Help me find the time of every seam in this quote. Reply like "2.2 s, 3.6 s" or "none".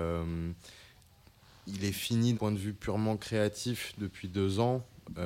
2.3 s